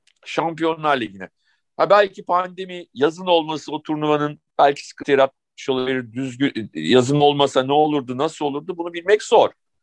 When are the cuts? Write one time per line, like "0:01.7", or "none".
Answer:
0:04.5